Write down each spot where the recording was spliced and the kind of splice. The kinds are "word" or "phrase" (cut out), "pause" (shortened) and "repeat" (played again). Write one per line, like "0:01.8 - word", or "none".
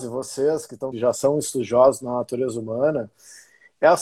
0:00.9 - phrase